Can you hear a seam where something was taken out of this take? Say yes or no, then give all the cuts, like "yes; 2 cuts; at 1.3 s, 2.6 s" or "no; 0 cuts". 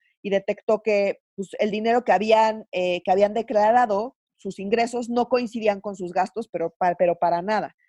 yes; 1 cut; at 1.2 s